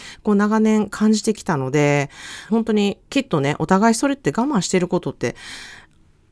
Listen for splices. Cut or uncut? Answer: cut